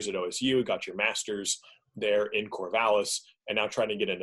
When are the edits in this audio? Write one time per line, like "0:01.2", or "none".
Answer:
none

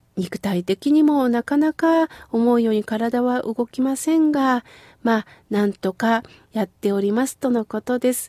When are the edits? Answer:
none

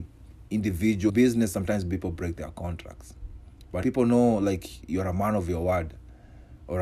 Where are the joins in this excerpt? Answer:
0:01.1
0:03.8

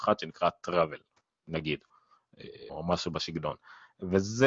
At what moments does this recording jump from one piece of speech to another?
0:02.7

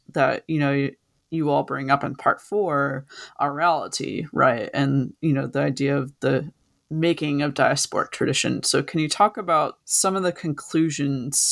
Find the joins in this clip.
0:09.8

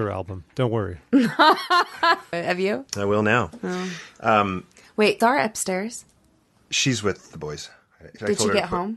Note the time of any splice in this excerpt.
0:02.3
0:02.9
0:05.2

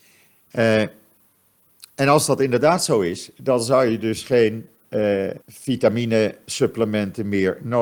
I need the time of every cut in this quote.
0:05.4

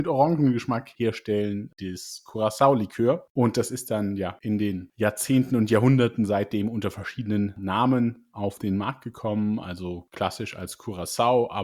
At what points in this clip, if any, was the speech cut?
none

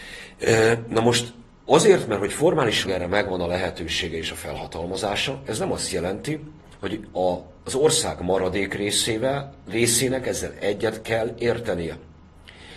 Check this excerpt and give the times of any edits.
0:02.8

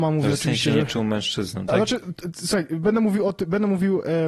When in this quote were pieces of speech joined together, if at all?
none

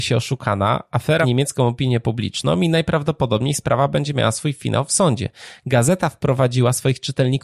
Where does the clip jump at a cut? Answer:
0:01.2

